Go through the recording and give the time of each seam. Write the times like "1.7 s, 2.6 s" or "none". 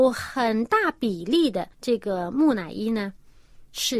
1.7 s